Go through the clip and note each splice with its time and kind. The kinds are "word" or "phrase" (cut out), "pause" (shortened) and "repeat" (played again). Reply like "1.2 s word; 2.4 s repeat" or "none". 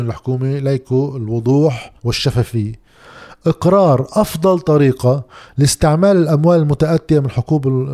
2.0 s pause